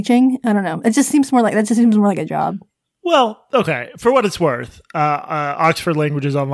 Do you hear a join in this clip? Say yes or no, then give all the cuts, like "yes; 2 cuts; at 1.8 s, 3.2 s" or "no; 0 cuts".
no; 0 cuts